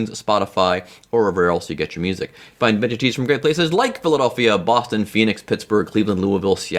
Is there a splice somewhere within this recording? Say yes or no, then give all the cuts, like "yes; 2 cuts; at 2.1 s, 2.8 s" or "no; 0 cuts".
no; 0 cuts